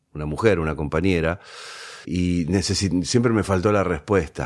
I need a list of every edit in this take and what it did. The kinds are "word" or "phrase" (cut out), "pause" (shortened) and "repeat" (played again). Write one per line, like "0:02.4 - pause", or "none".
0:02.0 - word